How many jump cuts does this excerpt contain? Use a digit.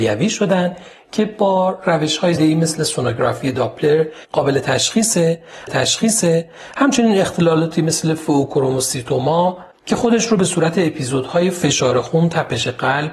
2